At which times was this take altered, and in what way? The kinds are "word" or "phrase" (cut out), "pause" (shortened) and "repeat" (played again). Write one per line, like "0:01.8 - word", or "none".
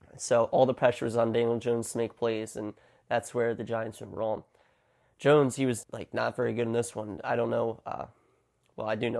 0:05.8 - word

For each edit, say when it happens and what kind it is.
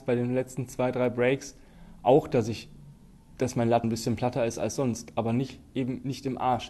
0:03.8 - word

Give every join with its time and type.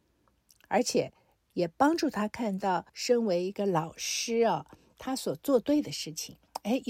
0:02.9 - pause

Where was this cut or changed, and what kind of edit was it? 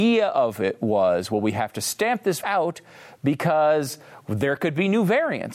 0:02.4 - word

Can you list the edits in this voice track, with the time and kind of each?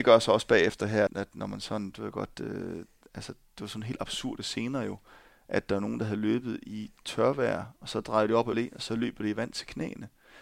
0:01.1 - word
0:08.5 - word

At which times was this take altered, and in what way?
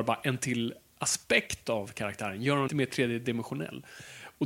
0:02.7 - word

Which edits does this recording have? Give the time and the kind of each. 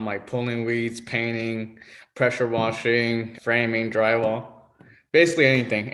0:03.4 - word

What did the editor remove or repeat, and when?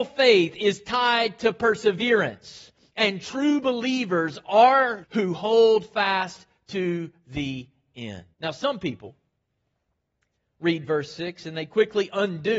0:05.0 - word
0:08.3 - pause

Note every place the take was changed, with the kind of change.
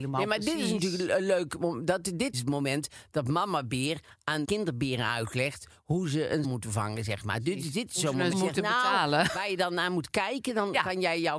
0:02.3 - word
0:04.4 - word
0:06.4 - word
0:08.3 - word

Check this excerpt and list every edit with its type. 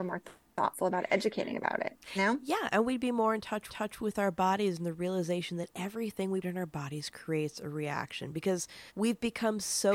0:02.2 - word
0:03.7 - repeat
0:06.4 - word
0:08.9 - pause

